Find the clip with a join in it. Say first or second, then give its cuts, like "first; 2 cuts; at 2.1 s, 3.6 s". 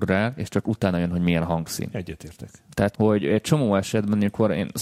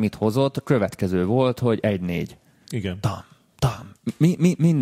first; 1 cut; at 2.9 s